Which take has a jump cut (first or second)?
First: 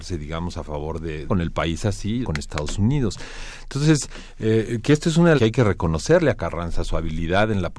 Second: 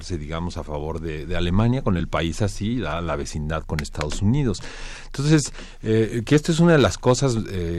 first